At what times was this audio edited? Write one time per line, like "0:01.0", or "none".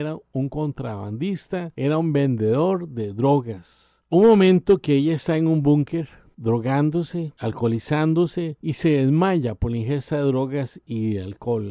none